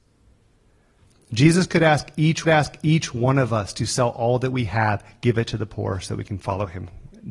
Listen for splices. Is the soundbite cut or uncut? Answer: cut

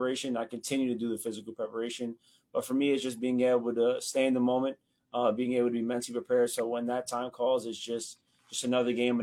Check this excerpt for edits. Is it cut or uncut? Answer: uncut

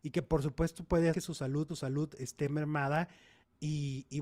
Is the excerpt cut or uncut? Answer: cut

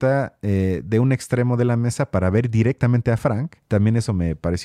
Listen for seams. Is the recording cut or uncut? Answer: cut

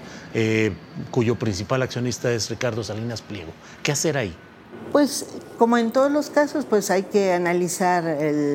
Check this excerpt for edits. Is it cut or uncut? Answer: uncut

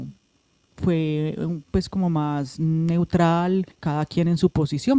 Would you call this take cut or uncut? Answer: cut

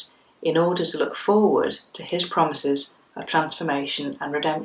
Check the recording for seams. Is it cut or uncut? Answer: uncut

